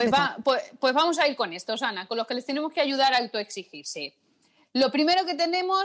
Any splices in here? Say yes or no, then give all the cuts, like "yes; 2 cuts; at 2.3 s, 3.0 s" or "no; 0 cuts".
no; 0 cuts